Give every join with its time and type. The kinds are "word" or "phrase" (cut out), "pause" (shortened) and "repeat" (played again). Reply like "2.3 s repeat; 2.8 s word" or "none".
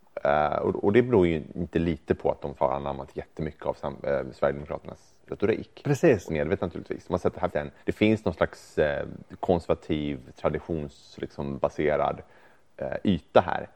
2.6 s word; 6.3 s phrase; 7.5 s word; 7.8 s pause